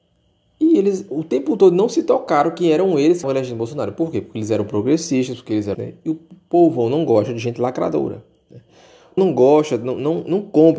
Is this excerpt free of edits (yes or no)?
no